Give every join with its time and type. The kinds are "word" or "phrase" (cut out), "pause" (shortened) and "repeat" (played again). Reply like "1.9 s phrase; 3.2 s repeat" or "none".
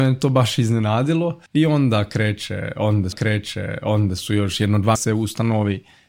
1.5 s pause; 3.1 s repeat; 5.0 s phrase